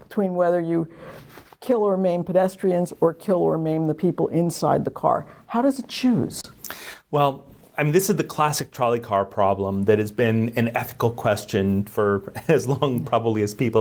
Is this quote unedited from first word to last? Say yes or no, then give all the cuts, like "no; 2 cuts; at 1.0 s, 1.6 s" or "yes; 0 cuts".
yes; 0 cuts